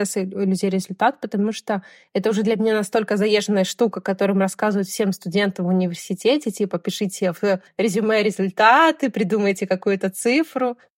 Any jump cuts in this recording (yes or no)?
no